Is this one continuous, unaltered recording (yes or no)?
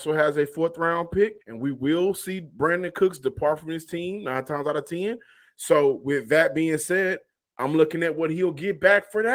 no